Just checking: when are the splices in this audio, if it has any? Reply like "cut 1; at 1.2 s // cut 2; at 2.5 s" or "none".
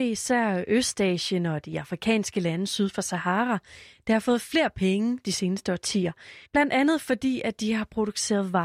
cut 1; at 6.4 s

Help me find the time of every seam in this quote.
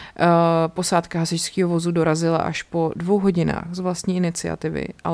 none

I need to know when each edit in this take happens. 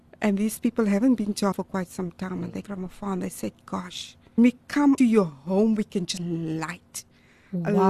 cut 1; at 1.5 s // cut 2; at 2.6 s // cut 3; at 4.4 s // cut 4; at 5.0 s // cut 5; at 6.2 s

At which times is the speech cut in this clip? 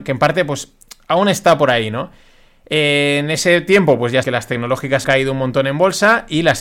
cut 1; at 4.2 s // cut 2; at 5.0 s

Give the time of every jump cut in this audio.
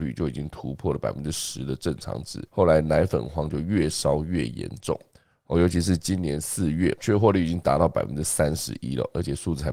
cut 1; at 2.5 s

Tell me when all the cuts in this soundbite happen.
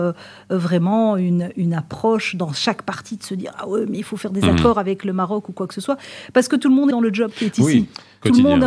cut 1; at 6.9 s

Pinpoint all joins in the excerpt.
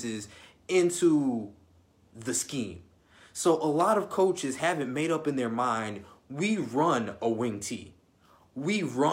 none

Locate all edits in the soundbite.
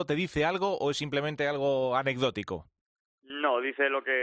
none

